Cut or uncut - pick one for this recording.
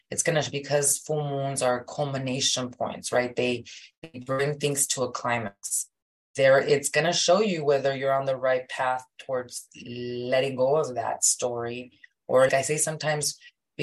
cut